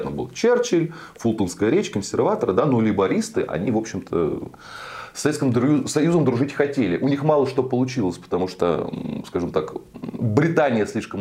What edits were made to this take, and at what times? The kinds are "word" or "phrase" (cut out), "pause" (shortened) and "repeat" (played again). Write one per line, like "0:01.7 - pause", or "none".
none